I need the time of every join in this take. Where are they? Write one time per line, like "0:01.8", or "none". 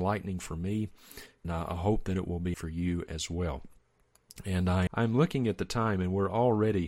0:01.4
0:02.5
0:04.9